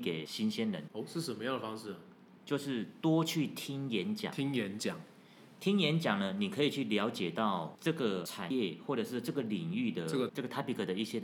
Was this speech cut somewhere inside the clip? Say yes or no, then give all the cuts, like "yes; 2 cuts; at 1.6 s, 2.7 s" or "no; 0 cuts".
yes; 1 cut; at 10.3 s